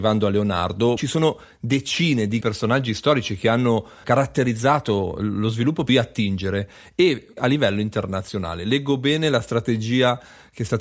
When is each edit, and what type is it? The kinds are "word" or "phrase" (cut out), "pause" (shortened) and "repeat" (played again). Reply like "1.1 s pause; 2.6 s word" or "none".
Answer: 1.0 s word; 2.4 s word; 4.0 s word; 5.9 s phrase; 7.4 s phrase